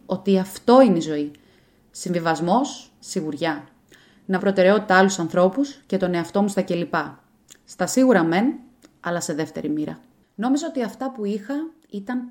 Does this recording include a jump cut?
yes; 2 cuts; at 3.0 s, 4.4 s

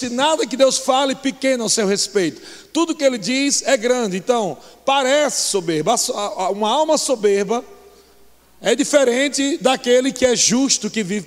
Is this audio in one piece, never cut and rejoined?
yes; 0 cuts

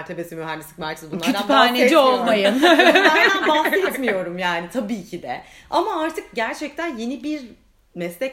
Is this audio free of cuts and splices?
yes; 0 cuts

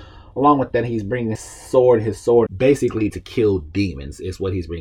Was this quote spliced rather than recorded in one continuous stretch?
yes; 3 cuts; at 1.4 s, 2.5 s, 3.1 s

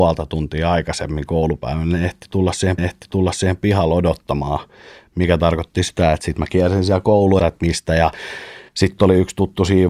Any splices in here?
yes; 3 cuts; at 2.8 s, 7.4 s, 8.7 s

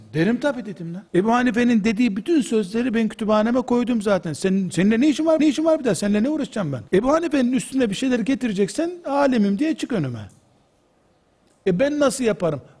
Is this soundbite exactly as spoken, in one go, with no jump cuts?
no; 3 cuts; at 1.1 s, 5.4 s, 6.9 s

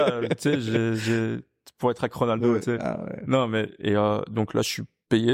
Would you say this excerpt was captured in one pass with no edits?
yes; 0 cuts

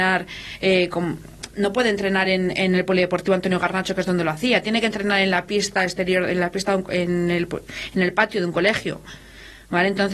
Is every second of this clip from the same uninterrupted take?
yes; 0 cuts

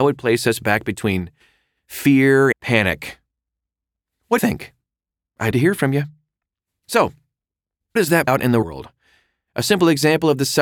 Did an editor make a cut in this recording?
yes; 6 cuts; at 2.5 s, 4.4 s, 5.5 s, 8.0 s, 8.3 s, 8.6 s

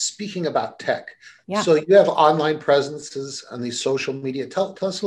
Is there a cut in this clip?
no; 0 cuts

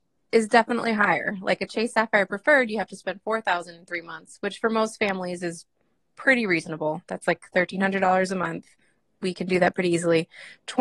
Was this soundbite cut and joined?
no; 0 cuts

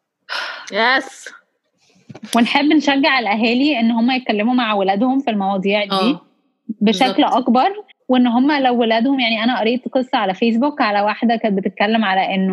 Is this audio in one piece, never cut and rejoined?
no; 1 cut; at 7.9 s

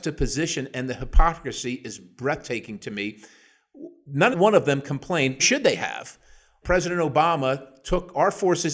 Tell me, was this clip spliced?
yes; 3 cuts; at 4.3 s, 5.4 s, 6.6 s

